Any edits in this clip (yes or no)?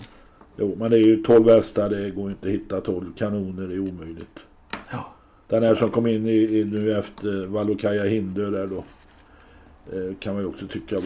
no